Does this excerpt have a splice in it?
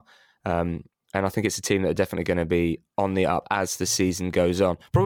no; 0 cuts

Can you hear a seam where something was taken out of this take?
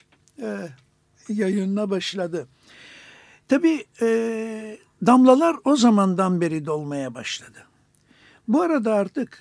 no; 0 cuts

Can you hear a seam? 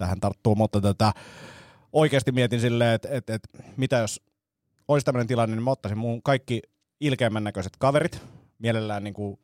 no; 0 cuts

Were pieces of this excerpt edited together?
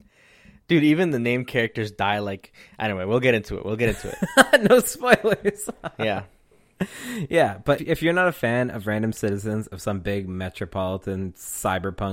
yes; 1 cut; at 7.8 s

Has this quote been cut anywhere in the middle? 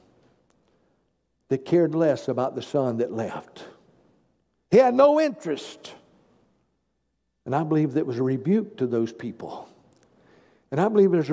no; 0 cuts

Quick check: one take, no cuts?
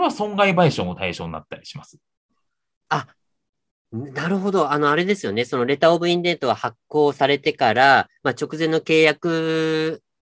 yes; 0 cuts

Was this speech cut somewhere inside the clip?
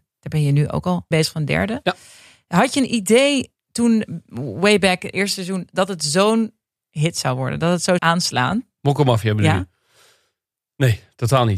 yes; 2 cuts; at 1.1 s, 8.0 s

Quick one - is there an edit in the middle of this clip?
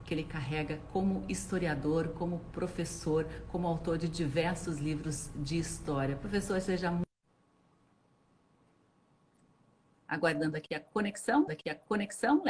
yes; 1 cut; at 11.5 s

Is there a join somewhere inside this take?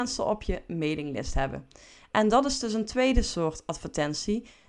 no; 0 cuts

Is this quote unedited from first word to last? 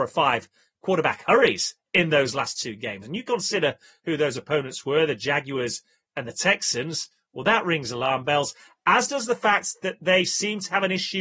yes; 0 cuts

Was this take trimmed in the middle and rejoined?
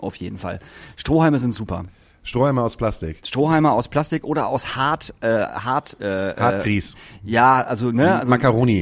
no; 0 cuts

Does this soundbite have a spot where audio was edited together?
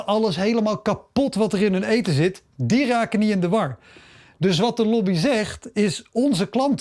no; 0 cuts

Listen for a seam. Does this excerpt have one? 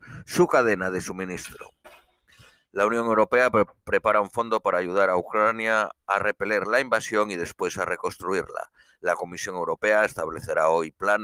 no; 0 cuts

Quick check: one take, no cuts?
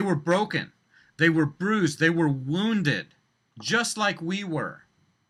yes; 0 cuts

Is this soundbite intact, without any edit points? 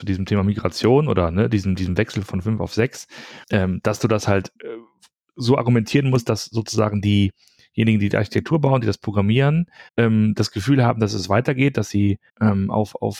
no; 4 cuts; at 3.4 s, 4.6 s, 9.9 s, 12.3 s

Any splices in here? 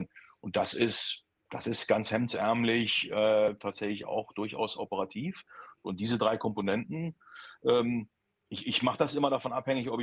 no; 0 cuts

